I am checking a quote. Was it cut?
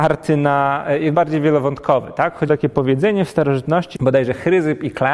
yes; 3 cuts; at 1.1 s, 2.5 s, 3.9 s

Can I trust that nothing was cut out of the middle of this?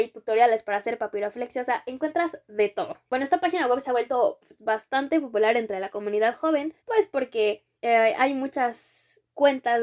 no; 3 cuts; at 3.1 s, 6.8 s, 7.7 s

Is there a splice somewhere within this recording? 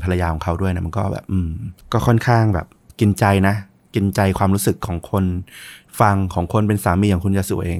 no; 0 cuts

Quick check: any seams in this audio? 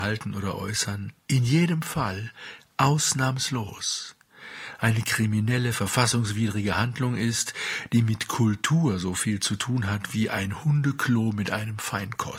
yes; 1 cut; at 1.2 s

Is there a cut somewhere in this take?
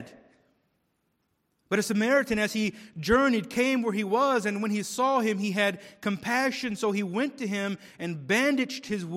no; 0 cuts

